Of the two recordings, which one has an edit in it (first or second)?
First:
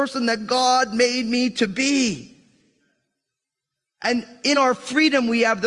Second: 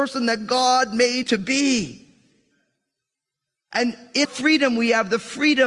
second